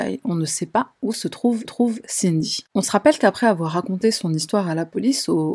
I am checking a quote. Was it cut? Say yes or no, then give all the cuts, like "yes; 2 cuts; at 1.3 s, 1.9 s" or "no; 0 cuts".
yes; 1 cut; at 1.6 s